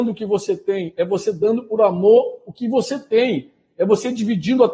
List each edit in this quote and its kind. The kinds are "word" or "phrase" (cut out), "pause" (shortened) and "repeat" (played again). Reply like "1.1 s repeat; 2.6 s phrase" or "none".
none